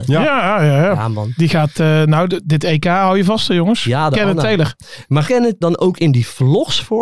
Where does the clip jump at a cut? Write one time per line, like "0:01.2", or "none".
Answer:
0:05.3
0:05.6

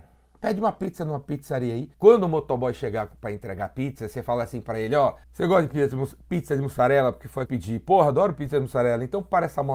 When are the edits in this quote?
0:01.9
0:05.2
0:07.5

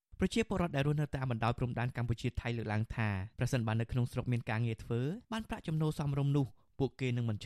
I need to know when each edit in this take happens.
0:03.3
0:05.2

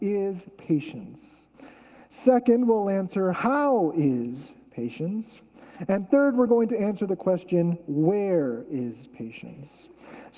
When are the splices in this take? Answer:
none

